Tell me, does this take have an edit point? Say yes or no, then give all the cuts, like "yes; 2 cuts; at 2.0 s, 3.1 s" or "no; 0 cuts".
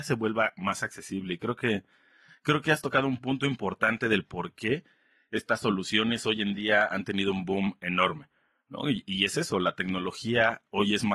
no; 0 cuts